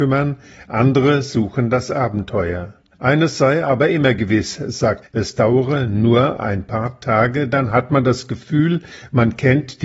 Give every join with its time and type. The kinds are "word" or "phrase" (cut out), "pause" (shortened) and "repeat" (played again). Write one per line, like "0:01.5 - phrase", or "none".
0:02.9 - pause
0:05.0 - word